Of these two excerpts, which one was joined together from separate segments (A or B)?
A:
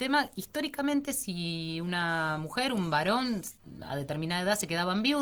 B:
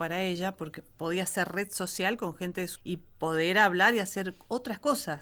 B